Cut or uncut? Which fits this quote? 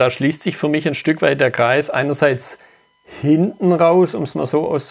uncut